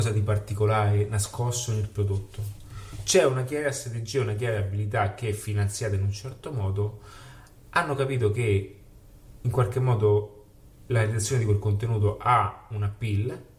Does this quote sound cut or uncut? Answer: uncut